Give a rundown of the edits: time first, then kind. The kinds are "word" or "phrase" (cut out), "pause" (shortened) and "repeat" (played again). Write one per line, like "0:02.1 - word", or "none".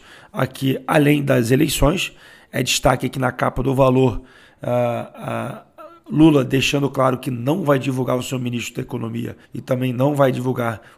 0:09.4 - pause